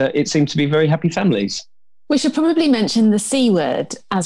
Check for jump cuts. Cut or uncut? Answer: uncut